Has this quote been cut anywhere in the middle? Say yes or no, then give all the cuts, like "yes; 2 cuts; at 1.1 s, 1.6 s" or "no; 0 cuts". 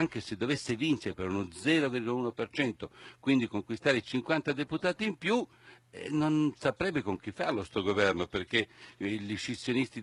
no; 0 cuts